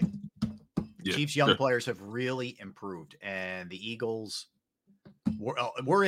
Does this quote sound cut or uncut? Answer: uncut